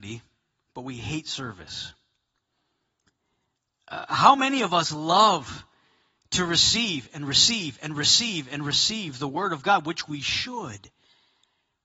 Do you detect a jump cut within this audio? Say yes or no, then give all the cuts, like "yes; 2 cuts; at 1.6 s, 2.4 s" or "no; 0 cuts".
no; 0 cuts